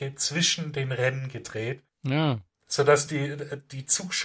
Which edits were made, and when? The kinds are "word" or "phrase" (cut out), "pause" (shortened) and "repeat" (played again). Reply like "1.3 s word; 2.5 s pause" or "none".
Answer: none